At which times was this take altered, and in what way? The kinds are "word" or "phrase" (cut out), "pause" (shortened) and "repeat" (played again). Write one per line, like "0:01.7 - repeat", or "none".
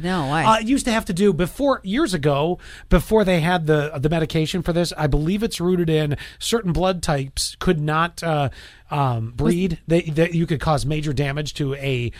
none